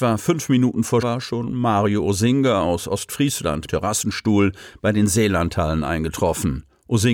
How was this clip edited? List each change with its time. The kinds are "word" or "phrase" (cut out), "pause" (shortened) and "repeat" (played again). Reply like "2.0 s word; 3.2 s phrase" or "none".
1.0 s word; 3.7 s word